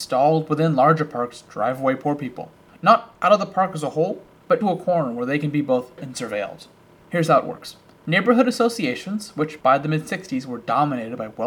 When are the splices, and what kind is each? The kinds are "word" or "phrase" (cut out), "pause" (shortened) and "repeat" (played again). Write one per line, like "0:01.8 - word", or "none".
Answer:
0:04.6 - word
0:06.0 - word